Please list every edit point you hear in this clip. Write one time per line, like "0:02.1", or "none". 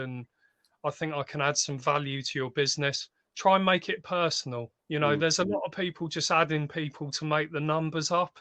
0:03.2
0:04.8